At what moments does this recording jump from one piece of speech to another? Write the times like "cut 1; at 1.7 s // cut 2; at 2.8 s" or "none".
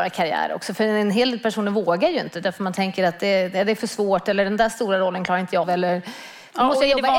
cut 1; at 5.6 s